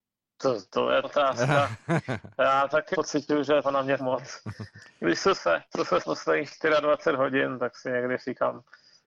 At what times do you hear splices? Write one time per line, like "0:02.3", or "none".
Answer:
0:01.0
0:02.9
0:03.6
0:04.0
0:05.3
0:05.7
0:06.0